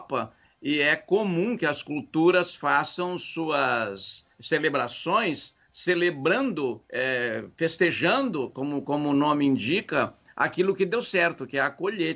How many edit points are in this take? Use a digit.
2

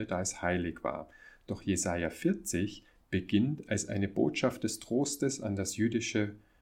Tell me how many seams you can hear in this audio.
0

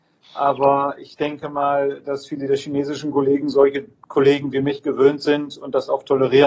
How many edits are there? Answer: 0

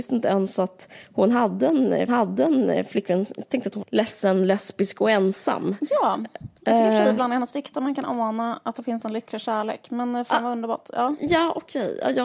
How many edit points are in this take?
2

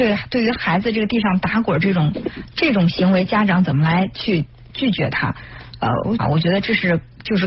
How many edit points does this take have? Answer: 1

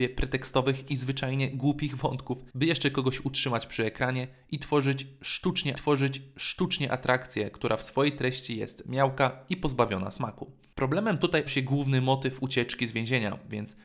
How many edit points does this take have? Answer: 3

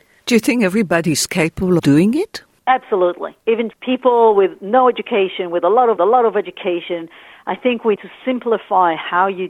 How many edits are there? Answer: 4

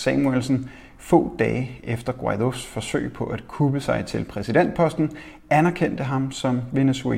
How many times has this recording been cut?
0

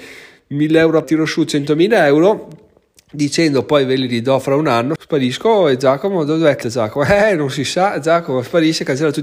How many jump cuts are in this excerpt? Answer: 3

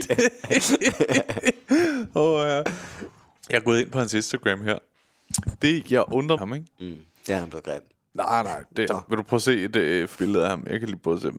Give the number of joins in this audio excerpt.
3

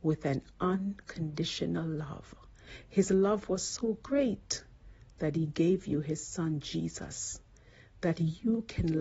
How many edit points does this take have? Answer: 0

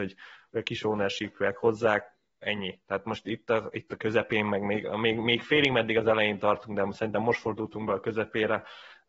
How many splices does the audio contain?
0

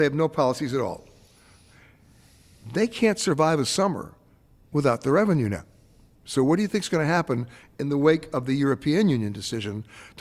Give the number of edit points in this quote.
0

